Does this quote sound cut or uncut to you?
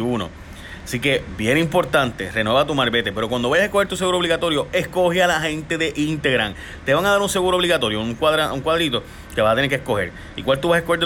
uncut